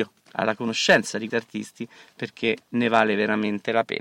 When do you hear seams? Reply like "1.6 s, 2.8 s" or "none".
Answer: 1.3 s

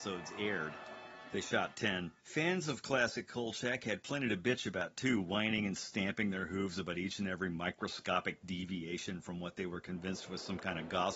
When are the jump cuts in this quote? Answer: 2.2 s

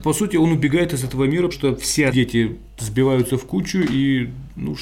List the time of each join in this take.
1.5 s, 2.1 s

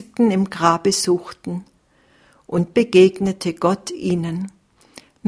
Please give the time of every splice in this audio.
2.7 s

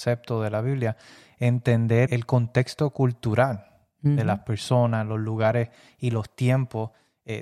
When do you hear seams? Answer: 2.1 s

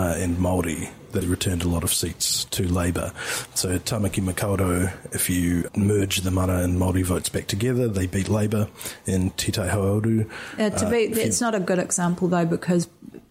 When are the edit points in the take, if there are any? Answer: 1.2 s, 5.7 s

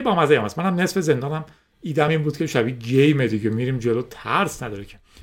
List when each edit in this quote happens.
none

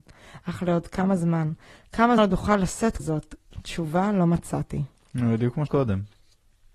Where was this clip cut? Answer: 2.2 s, 3.0 s, 5.7 s

